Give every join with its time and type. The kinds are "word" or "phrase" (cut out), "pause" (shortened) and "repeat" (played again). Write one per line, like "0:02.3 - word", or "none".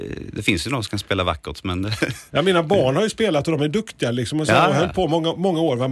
none